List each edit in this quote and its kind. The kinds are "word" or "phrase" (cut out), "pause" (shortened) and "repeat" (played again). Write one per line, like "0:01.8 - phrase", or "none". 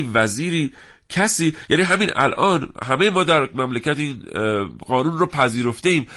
none